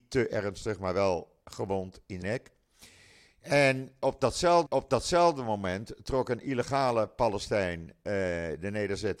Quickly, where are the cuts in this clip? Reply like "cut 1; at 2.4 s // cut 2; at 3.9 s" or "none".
cut 1; at 2.2 s // cut 2; at 4.7 s